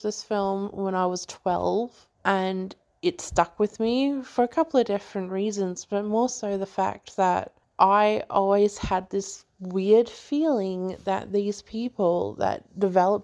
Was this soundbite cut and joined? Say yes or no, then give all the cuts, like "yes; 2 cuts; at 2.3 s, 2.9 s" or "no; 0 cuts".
no; 0 cuts